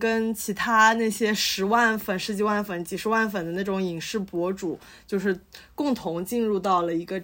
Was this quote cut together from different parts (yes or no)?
no